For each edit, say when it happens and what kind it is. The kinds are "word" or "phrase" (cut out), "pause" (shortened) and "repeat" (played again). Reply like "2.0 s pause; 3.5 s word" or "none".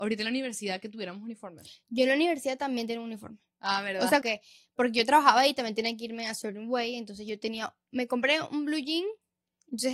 4.2 s word